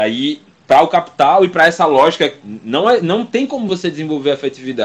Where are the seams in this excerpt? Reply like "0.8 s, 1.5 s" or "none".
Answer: none